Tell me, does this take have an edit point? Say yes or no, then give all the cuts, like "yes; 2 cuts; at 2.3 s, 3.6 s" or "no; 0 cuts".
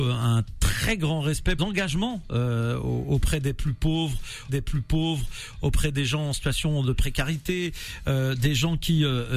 yes; 2 cuts; at 1.6 s, 4.5 s